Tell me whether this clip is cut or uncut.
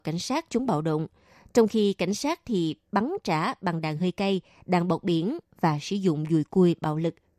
uncut